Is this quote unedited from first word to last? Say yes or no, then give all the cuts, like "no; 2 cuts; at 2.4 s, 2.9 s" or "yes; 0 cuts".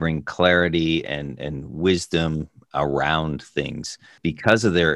yes; 0 cuts